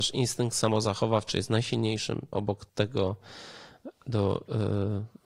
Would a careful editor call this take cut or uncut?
cut